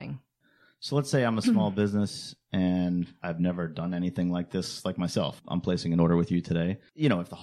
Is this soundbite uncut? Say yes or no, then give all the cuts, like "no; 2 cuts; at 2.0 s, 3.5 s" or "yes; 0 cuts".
yes; 0 cuts